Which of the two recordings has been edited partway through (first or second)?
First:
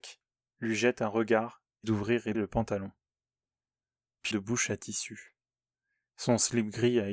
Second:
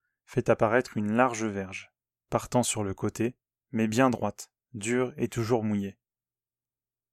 first